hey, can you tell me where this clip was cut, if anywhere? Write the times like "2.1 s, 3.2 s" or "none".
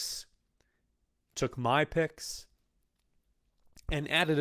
none